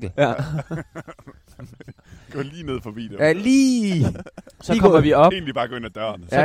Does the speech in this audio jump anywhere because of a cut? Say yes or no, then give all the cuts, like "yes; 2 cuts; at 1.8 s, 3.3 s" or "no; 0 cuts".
no; 0 cuts